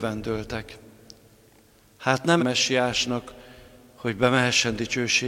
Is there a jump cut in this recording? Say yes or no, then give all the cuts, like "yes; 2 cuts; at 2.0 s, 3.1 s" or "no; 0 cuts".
yes; 1 cut; at 2.4 s